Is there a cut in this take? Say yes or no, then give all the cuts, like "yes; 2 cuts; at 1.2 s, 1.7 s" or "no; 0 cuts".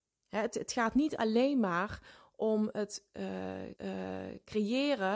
yes; 1 cut; at 3.7 s